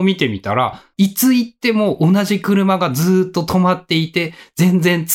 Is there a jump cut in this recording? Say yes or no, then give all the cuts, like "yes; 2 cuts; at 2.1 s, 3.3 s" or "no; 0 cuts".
yes; 1 cut; at 0.9 s